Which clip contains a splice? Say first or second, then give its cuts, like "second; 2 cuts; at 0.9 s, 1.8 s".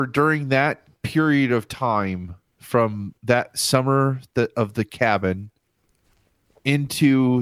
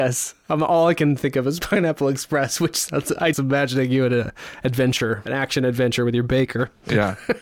second; 2 cuts; at 3.3 s, 5.3 s